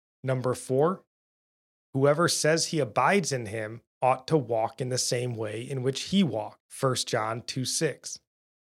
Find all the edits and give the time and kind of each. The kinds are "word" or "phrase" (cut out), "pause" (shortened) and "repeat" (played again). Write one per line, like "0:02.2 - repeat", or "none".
0:03.9 - pause
0:06.7 - pause